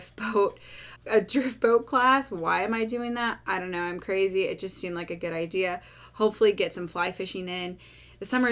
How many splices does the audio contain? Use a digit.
1